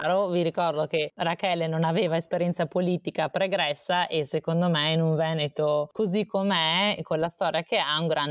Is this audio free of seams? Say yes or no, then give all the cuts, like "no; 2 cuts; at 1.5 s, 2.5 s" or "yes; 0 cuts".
yes; 0 cuts